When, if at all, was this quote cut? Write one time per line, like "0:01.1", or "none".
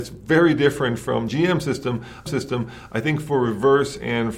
0:01.3
0:02.3